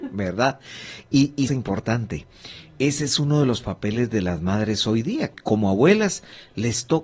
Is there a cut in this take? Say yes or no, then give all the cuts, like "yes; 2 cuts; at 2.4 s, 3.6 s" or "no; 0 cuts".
yes; 2 cuts; at 1.5 s, 5.3 s